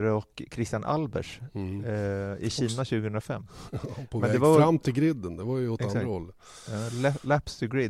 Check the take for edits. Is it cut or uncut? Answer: uncut